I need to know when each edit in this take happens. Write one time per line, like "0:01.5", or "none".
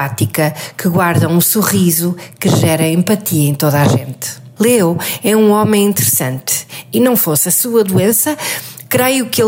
0:04.5